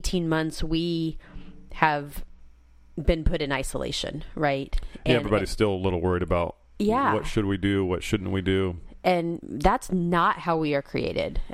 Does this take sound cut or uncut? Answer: uncut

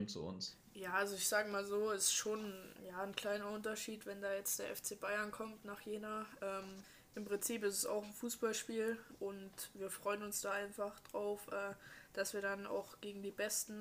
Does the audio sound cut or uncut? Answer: uncut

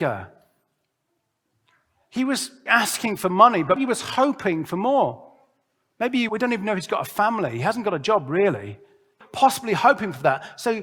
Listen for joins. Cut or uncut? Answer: cut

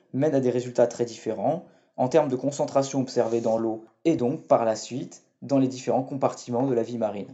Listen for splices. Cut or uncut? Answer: uncut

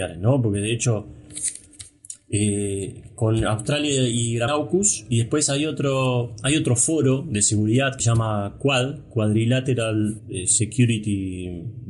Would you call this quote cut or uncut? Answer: cut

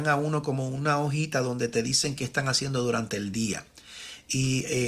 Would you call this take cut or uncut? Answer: uncut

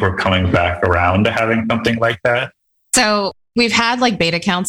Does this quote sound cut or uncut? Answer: uncut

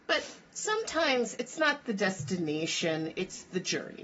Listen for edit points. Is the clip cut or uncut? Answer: uncut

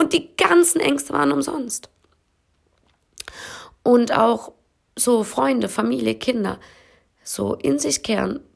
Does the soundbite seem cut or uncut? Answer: uncut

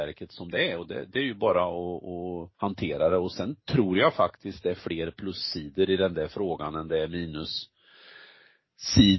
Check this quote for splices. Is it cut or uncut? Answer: cut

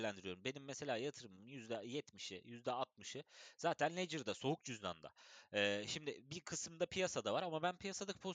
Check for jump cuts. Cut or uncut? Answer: uncut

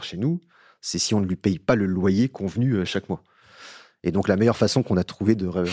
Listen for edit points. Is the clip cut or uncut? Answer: uncut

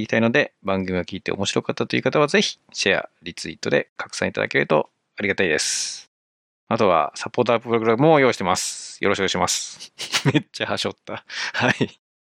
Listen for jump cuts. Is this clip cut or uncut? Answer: uncut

